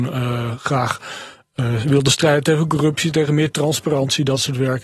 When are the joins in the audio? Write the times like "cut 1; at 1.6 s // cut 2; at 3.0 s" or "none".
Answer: none

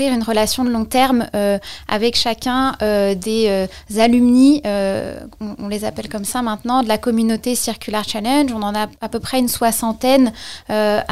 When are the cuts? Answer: cut 1; at 9.0 s

